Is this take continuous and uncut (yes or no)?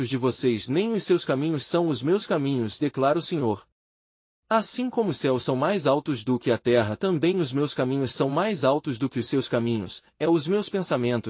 yes